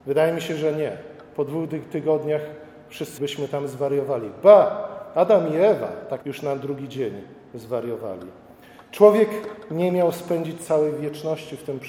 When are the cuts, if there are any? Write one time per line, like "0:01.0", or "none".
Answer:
0:03.2
0:06.2